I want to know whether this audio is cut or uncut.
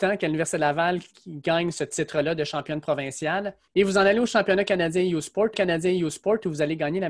cut